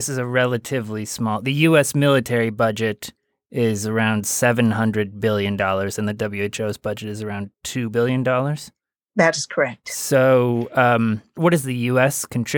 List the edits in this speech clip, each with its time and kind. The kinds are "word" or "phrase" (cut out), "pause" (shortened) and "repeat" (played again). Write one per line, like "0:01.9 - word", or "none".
none